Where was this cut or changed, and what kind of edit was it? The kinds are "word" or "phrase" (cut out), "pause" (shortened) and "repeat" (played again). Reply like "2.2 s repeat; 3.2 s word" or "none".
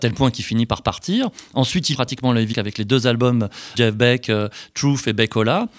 1.9 s word; 2.5 s word; 3.7 s word